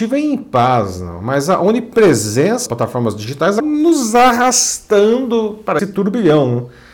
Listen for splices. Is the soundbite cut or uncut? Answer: cut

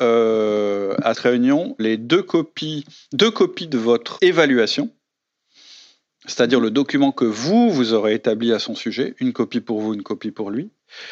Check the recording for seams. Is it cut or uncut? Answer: cut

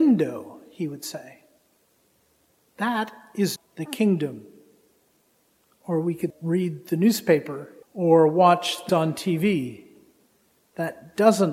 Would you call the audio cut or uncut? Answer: cut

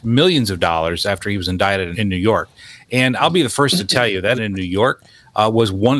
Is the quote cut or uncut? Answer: cut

